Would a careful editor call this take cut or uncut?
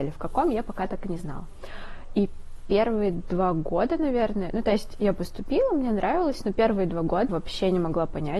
cut